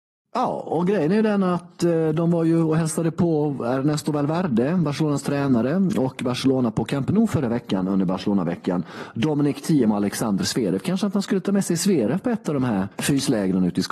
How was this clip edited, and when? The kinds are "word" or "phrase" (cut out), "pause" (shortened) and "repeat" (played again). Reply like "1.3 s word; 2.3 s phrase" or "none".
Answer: 12.9 s pause